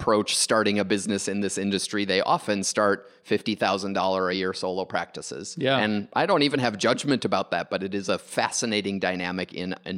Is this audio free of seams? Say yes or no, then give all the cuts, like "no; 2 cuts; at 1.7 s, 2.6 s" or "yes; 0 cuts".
yes; 0 cuts